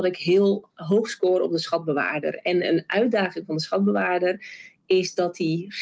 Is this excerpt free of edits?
yes; 0 cuts

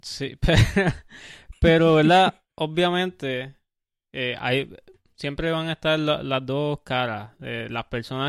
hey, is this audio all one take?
yes; 0 cuts

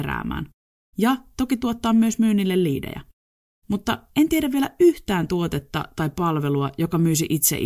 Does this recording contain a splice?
no; 0 cuts

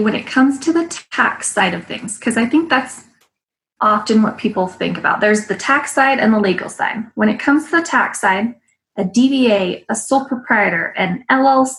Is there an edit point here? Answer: no; 0 cuts

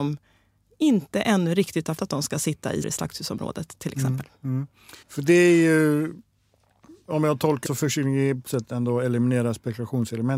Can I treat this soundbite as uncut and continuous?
no; 5 cuts; at 2.0 s, 2.8 s, 5.0 s, 7.6 s, 8.5 s

